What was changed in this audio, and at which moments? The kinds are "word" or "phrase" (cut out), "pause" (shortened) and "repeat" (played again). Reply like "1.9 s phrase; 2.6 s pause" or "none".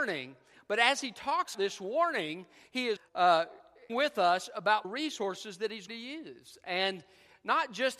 1.5 s word; 3.0 s word; 3.9 s word; 4.8 s word; 5.9 s word